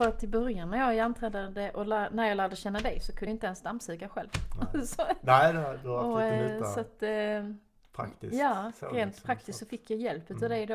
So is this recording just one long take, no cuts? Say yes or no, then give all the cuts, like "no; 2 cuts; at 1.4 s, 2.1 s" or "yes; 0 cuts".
no; 1 cut; at 3.3 s